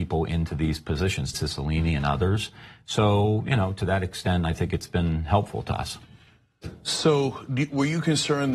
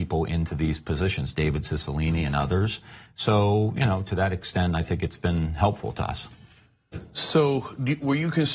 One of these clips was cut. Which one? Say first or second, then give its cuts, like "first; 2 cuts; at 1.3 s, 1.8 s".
first; 1 cut; at 1.3 s